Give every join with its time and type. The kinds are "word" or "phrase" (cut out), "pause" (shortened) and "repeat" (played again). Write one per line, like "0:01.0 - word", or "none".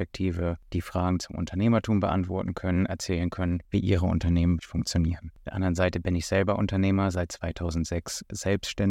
0:03.7 - pause
0:04.6 - word